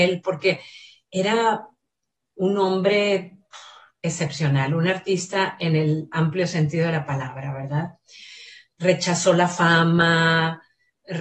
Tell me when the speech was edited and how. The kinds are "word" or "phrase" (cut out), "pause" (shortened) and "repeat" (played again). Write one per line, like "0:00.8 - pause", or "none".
none